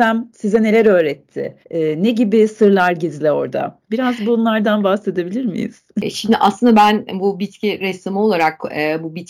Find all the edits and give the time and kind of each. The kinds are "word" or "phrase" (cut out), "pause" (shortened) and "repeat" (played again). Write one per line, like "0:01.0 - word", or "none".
0:01.6 - pause
0:03.8 - pause